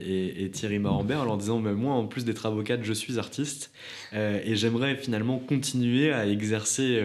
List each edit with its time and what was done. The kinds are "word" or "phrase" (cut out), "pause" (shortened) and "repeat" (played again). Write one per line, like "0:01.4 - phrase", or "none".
none